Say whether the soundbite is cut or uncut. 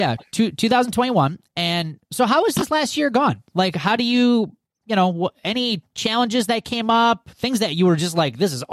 uncut